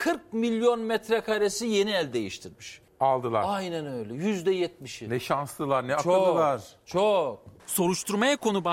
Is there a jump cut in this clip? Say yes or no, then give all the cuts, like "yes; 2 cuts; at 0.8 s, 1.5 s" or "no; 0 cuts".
no; 0 cuts